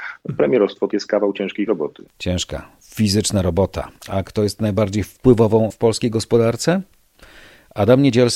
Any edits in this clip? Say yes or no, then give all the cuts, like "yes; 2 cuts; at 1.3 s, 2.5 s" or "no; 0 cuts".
yes; 4 cuts; at 0.9 s, 1.7 s, 4.0 s, 5.7 s